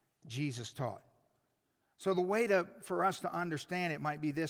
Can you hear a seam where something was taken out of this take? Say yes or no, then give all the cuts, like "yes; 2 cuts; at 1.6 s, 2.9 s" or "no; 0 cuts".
no; 0 cuts